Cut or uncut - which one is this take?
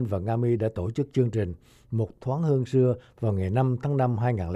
uncut